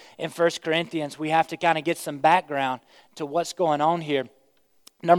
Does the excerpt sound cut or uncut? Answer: uncut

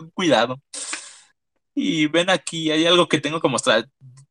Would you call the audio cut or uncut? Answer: uncut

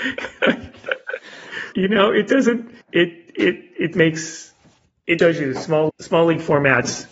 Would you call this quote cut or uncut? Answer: cut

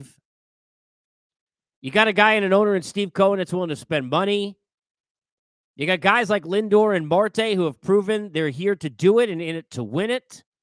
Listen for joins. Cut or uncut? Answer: uncut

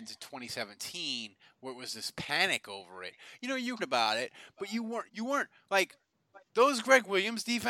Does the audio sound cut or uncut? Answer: cut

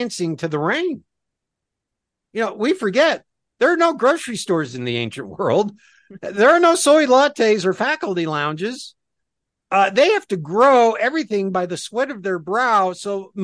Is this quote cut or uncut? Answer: uncut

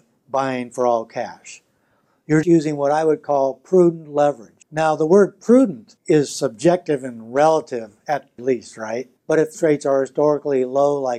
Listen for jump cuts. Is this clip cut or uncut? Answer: cut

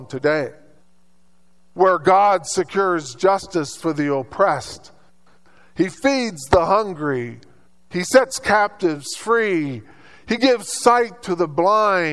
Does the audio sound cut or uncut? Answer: uncut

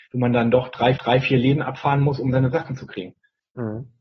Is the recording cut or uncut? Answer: cut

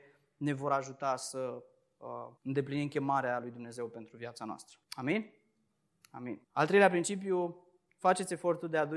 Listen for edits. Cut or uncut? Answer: cut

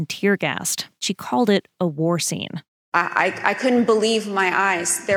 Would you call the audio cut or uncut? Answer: cut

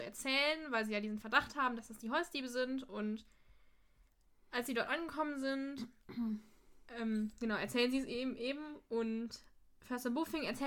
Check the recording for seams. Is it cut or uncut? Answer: uncut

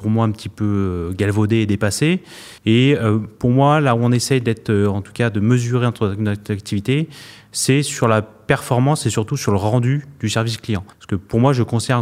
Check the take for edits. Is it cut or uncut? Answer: cut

